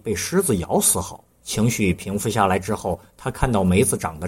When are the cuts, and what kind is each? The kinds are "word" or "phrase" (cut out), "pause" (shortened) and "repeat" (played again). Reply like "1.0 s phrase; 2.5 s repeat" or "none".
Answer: 1.3 s pause